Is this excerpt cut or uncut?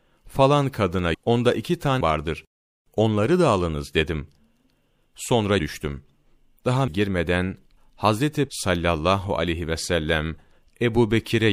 cut